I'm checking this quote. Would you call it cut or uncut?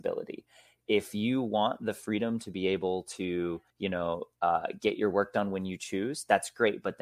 cut